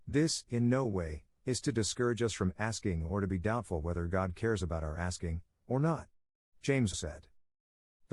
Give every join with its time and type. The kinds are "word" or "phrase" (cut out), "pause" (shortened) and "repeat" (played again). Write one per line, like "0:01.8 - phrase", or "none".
0:06.9 - word